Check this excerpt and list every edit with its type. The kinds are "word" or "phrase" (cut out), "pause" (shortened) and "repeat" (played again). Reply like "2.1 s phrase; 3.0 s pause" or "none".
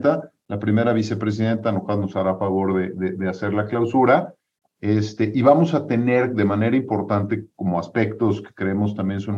none

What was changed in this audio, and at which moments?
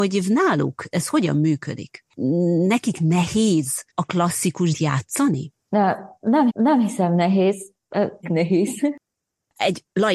0.9 s word; 3.9 s pause; 4.7 s word; 5.6 s pause; 6.5 s repeat; 8.2 s phrase

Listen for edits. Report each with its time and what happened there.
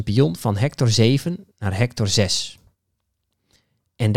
none

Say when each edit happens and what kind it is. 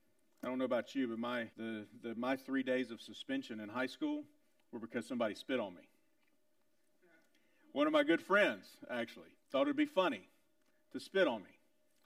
1.5 s pause; 9.4 s pause

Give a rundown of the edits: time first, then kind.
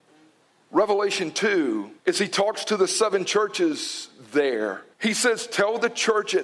2.0 s pause; 4.9 s pause

